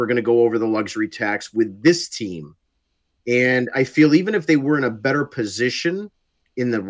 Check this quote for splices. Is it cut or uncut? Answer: uncut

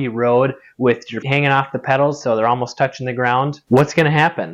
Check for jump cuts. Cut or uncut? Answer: cut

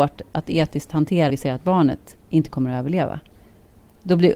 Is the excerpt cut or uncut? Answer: cut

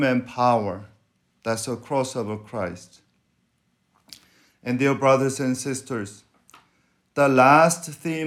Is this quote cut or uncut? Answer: uncut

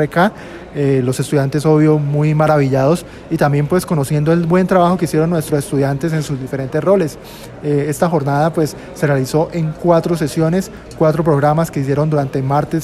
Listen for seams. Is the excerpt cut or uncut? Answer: uncut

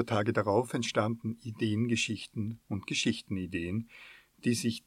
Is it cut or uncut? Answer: uncut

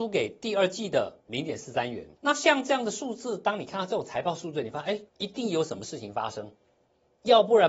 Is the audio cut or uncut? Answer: cut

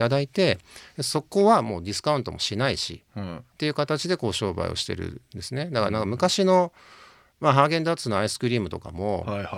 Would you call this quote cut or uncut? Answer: uncut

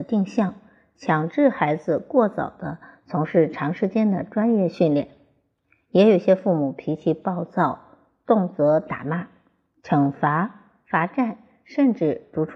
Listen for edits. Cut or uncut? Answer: uncut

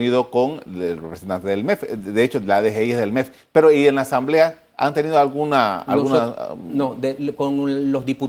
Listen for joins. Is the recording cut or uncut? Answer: uncut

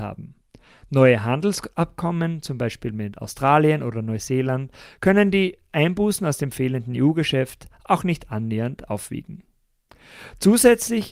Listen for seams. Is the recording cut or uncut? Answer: uncut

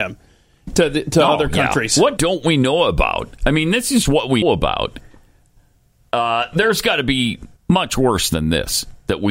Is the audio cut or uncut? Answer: cut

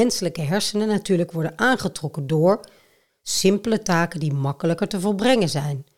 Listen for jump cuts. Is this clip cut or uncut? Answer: uncut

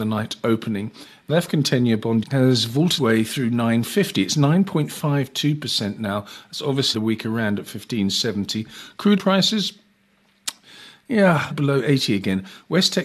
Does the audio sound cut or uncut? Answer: cut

